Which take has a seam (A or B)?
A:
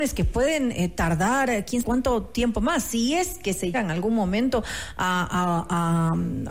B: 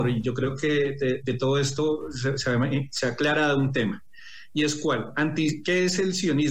A